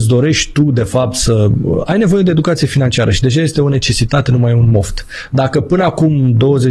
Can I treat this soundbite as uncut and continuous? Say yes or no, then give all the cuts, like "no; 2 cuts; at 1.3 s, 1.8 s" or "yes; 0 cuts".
no; 1 cut; at 1.9 s